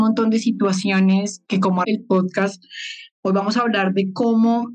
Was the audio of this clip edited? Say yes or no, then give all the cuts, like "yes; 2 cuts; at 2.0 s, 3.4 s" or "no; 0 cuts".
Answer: yes; 2 cuts; at 1.4 s, 1.8 s